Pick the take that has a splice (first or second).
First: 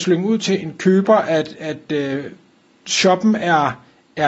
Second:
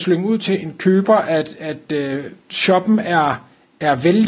second